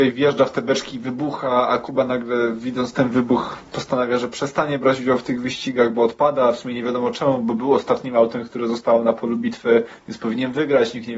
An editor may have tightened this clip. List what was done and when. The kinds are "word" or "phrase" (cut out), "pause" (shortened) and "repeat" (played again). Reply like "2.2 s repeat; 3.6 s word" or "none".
none